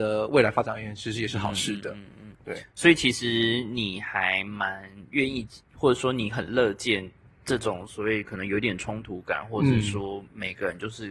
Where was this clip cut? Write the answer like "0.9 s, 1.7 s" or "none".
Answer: none